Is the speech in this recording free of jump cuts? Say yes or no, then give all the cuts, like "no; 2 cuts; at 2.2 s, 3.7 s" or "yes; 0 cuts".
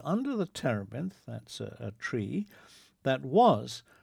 yes; 0 cuts